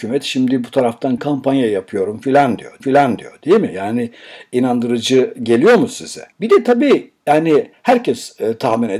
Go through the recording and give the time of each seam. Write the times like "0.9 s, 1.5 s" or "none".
1.2 s, 2.8 s, 6.3 s